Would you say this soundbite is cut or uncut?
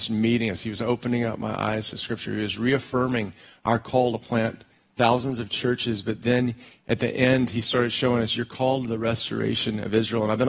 uncut